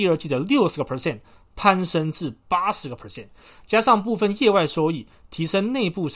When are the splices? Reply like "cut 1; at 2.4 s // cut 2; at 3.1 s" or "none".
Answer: none